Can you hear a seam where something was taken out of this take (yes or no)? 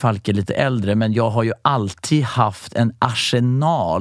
no